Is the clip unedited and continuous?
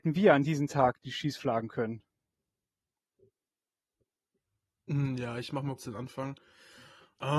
no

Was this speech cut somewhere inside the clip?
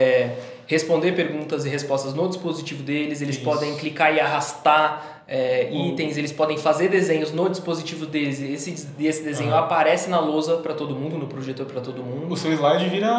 no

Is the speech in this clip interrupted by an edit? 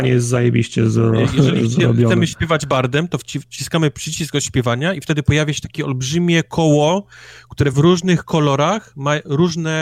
no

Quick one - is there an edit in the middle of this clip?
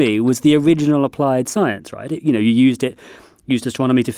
no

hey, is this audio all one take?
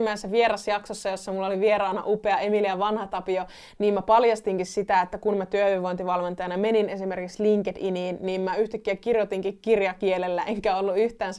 yes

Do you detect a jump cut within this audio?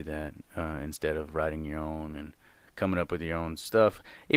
no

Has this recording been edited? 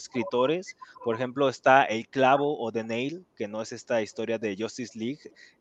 no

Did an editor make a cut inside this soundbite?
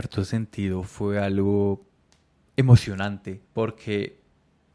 yes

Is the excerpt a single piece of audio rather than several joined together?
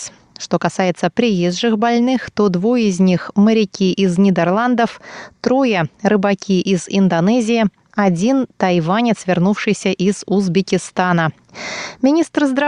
yes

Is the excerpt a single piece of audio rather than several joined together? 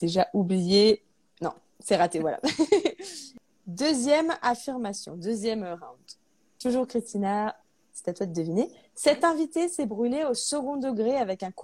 yes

